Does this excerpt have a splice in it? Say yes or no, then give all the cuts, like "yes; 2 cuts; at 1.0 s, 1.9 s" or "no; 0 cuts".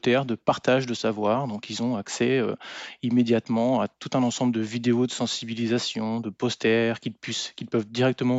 no; 0 cuts